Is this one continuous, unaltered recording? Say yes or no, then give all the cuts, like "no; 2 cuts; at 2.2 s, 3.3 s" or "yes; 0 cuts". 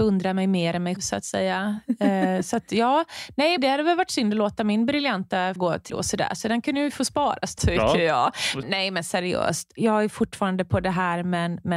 no; 6 cuts; at 1.0 s, 3.6 s, 5.6 s, 5.9 s, 7.6 s, 8.6 s